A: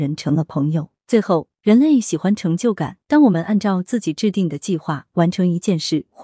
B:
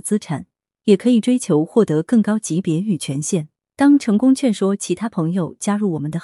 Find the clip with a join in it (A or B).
A